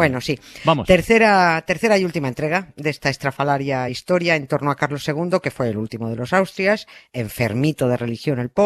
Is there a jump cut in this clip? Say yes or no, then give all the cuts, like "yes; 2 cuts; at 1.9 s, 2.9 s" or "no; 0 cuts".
no; 0 cuts